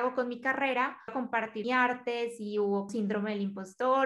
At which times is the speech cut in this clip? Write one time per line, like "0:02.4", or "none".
0:01.1
0:01.6
0:02.9